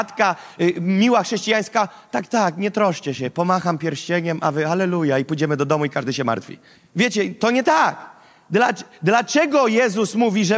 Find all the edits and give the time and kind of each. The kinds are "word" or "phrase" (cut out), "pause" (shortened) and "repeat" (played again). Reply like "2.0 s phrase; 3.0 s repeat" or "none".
6.7 s pause